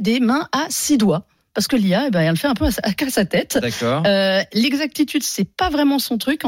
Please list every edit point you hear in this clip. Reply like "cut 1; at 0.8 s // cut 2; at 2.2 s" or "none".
none